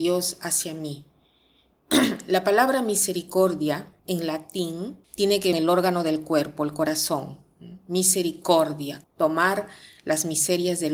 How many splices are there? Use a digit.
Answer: 4